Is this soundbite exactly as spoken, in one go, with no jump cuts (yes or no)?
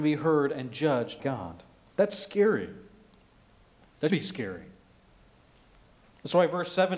no